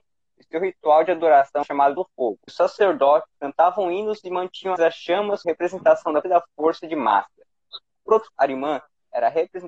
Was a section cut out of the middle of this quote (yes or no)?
yes